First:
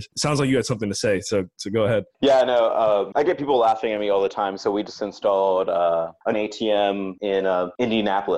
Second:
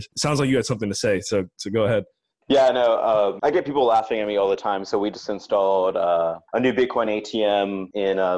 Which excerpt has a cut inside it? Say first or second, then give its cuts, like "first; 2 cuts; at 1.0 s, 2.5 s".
first; 2 cuts; at 2.1 s, 6.3 s